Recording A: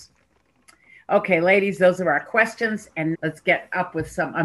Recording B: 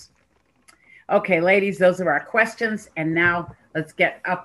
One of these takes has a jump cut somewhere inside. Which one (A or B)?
A